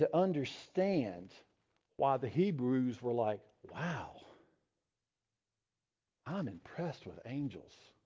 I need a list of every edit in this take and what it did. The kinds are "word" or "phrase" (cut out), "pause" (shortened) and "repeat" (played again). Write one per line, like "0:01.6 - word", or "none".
none